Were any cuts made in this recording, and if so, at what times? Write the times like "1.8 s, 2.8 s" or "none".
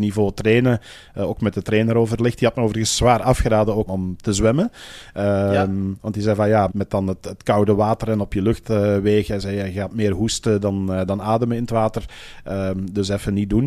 3.9 s, 6.7 s